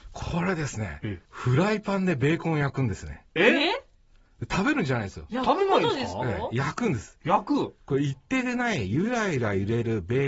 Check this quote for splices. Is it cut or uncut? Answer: cut